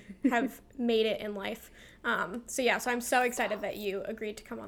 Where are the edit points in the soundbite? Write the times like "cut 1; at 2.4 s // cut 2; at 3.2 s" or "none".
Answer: none